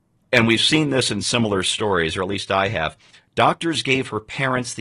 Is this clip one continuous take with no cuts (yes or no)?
yes